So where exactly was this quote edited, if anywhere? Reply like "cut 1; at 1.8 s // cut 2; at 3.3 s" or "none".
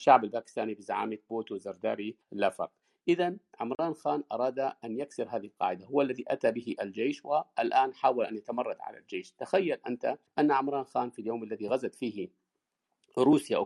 cut 1; at 2.2 s // cut 2; at 10.3 s